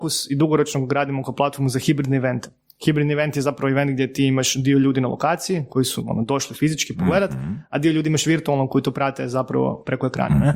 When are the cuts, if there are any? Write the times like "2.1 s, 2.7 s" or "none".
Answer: none